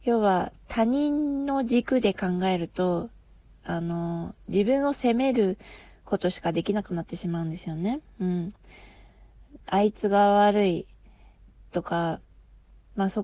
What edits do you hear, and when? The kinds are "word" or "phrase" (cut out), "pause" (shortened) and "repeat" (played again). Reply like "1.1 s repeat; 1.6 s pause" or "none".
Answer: 9.6 s pause